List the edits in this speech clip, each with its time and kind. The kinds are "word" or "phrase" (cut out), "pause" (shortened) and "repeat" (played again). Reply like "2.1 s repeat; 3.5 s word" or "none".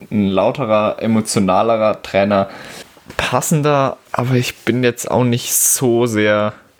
4.1 s pause

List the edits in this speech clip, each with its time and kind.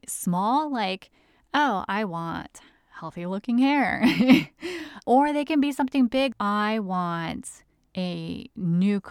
5.0 s word; 6.3 s word

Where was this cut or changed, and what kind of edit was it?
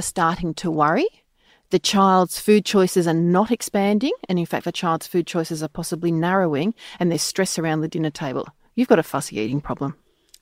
none

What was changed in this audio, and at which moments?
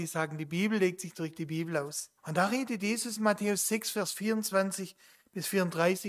2.2 s pause

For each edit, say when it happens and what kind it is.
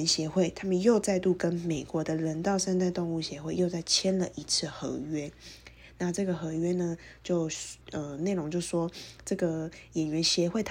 7.8 s pause

